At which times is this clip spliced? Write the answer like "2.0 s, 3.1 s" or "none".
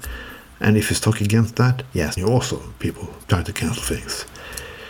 2.2 s, 3.2 s